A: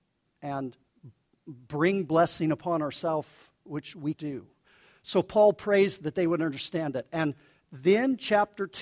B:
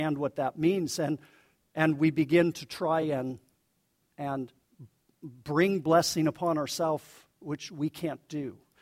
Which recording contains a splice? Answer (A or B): A